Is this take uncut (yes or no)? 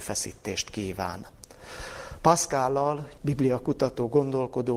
no